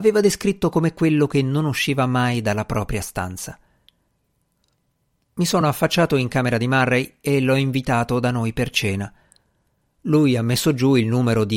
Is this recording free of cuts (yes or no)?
yes